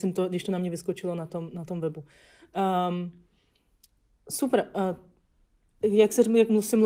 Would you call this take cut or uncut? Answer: uncut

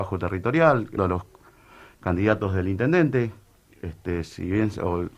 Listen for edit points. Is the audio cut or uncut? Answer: cut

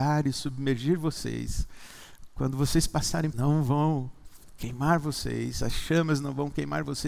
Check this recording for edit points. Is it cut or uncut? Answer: cut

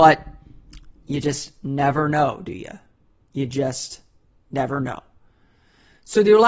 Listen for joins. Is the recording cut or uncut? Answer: uncut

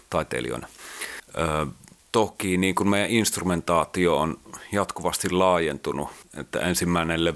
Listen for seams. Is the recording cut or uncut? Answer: uncut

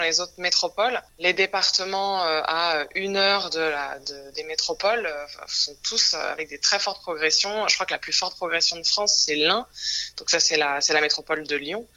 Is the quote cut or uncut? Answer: uncut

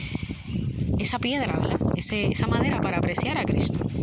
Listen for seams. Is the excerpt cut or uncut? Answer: uncut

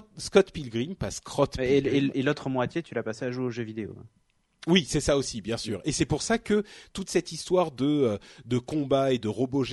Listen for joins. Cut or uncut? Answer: uncut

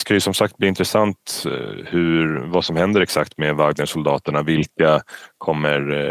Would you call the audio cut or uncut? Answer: uncut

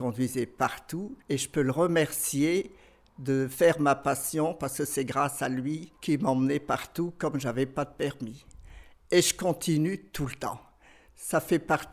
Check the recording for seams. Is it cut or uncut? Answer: cut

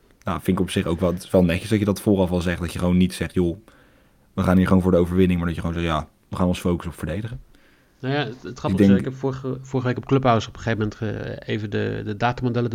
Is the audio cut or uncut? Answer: uncut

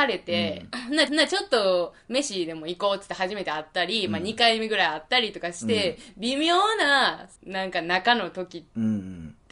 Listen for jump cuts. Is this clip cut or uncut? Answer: cut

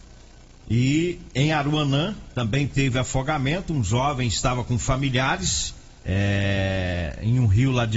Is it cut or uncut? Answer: cut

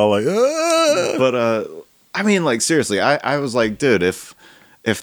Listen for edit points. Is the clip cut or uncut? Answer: uncut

